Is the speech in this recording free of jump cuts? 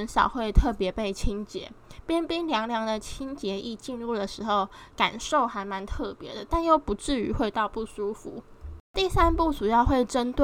yes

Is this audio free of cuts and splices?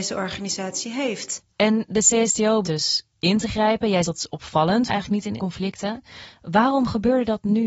no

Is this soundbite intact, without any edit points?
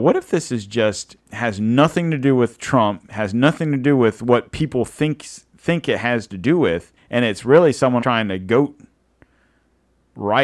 no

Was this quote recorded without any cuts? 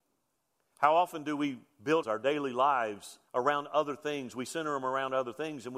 no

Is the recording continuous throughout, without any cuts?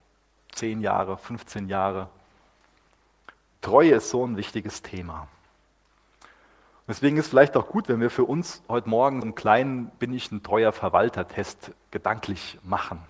no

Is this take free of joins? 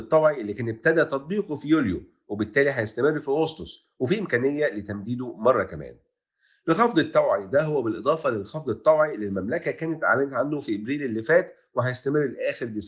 yes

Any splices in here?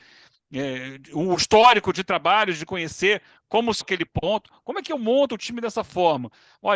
yes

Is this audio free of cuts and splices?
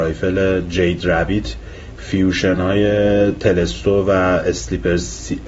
yes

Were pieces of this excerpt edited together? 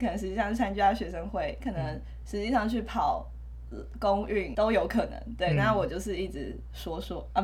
yes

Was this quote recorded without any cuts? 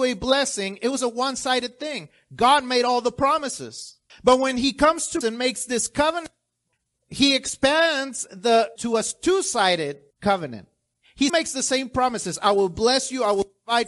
no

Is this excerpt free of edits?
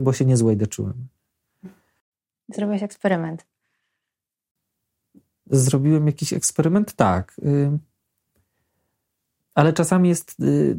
yes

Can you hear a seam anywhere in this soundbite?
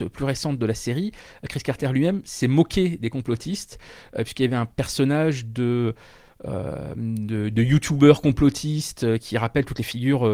no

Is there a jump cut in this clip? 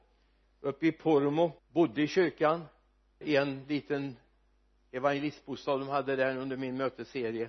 yes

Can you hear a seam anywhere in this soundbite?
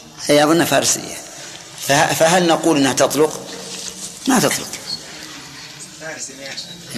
no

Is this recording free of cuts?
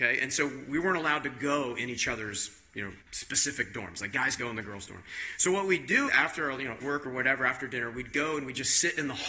no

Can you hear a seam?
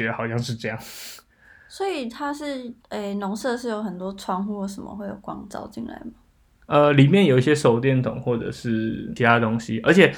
yes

